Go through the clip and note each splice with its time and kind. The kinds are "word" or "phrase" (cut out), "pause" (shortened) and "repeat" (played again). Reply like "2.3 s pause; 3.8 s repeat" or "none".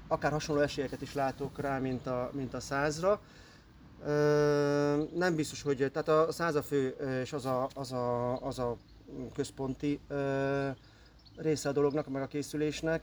none